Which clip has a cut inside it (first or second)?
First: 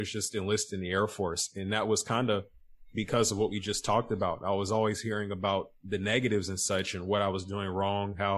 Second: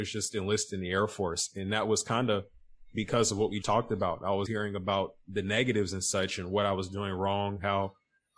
second